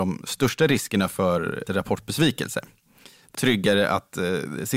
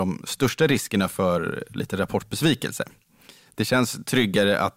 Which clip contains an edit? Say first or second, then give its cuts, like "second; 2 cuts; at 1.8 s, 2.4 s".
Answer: first; 2 cuts; at 1.7 s, 3.3 s